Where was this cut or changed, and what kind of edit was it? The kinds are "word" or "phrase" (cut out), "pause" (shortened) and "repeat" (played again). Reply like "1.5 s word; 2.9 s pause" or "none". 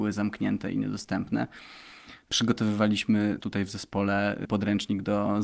3.4 s word; 4.5 s word

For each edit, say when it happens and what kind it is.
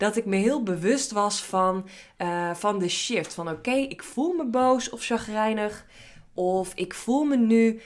none

